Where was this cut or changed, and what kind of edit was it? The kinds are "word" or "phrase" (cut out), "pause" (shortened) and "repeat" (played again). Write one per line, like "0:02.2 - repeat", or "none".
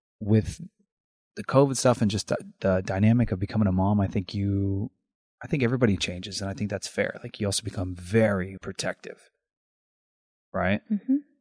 0:08.6 - word